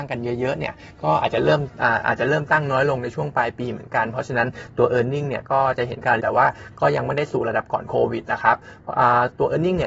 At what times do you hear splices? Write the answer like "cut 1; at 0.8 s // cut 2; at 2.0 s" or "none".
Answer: cut 1; at 6.2 s